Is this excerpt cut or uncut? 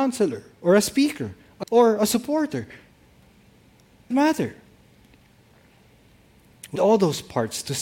cut